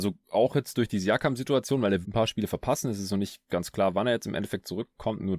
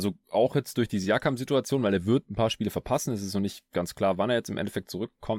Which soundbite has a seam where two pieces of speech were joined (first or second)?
first